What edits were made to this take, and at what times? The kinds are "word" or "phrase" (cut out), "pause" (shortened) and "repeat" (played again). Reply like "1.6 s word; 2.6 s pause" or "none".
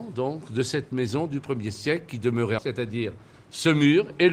2.6 s word